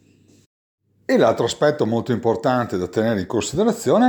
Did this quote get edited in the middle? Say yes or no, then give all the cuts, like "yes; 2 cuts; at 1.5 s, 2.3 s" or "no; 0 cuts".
no; 0 cuts